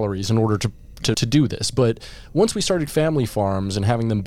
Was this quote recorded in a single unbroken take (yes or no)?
no